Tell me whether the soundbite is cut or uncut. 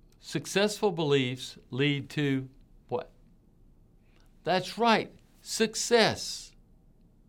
uncut